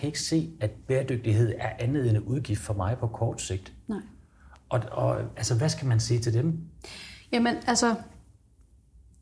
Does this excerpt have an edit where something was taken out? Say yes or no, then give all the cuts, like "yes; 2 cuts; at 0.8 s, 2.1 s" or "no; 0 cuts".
no; 0 cuts